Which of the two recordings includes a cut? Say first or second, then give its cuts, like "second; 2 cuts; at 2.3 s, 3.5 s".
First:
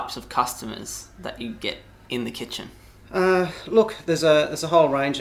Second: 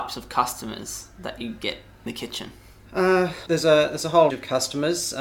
second; 3 cuts; at 2.1 s, 3.5 s, 4.3 s